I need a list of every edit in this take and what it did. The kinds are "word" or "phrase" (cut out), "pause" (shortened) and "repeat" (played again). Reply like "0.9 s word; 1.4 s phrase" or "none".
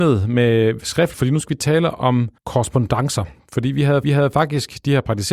1.1 s word; 2.4 s pause; 4.0 s repeat